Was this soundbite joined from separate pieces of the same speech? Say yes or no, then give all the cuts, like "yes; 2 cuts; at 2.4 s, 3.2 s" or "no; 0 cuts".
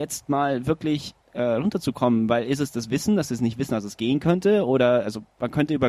yes; 1 cut; at 1.2 s